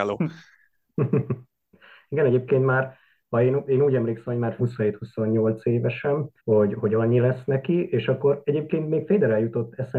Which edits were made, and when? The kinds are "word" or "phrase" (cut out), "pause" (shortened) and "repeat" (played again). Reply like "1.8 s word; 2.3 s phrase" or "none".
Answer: 4.6 s phrase; 6.4 s pause